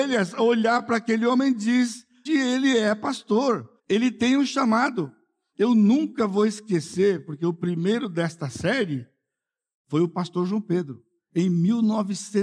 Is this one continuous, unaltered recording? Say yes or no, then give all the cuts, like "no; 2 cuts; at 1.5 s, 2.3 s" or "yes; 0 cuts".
no; 2 cuts; at 2.3 s, 3.8 s